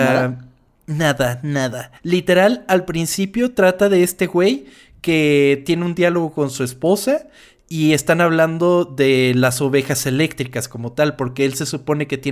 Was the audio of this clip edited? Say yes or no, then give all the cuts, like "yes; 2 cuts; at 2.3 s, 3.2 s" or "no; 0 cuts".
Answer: yes; 1 cut; at 2.0 s